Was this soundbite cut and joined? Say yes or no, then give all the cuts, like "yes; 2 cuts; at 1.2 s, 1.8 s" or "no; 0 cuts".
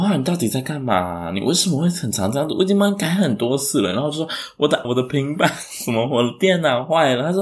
yes; 1 cut; at 4.8 s